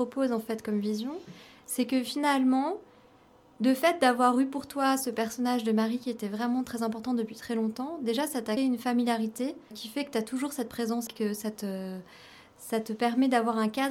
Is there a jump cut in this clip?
yes; 3 cuts; at 8.6 s, 9.7 s, 11.1 s

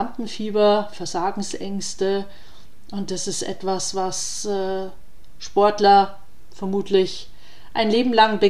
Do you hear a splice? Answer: no; 0 cuts

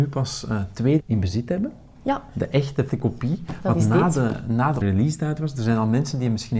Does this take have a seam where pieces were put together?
yes; 3 cuts; at 1.0 s, 2.9 s, 4.8 s

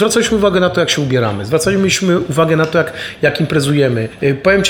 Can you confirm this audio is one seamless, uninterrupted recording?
yes; 0 cuts

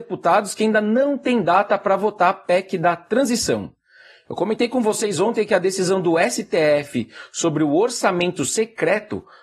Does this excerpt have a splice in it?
no; 0 cuts

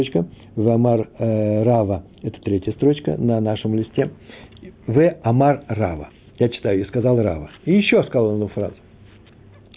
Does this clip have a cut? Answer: no; 0 cuts

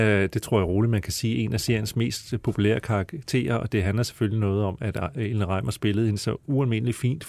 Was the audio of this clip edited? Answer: no; 0 cuts

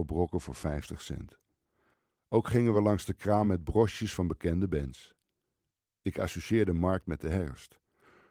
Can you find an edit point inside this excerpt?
no; 0 cuts

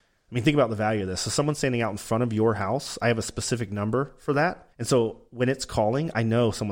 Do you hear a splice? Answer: yes; 1 cut; at 4.7 s

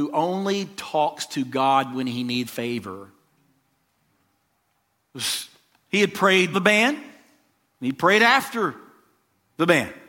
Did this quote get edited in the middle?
yes; 2 cuts; at 2.5 s, 6.5 s

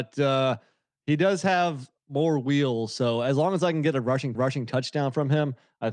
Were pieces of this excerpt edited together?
yes; 1 cut; at 4.3 s

